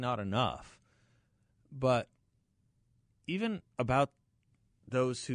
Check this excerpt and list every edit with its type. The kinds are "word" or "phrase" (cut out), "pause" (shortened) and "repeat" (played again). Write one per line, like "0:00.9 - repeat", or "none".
0:03.7 - pause